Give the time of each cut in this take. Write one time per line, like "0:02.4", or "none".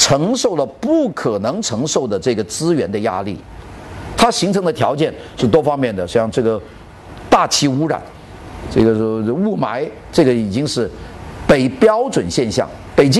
0:04.1